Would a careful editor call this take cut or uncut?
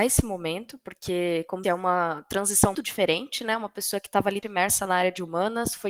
cut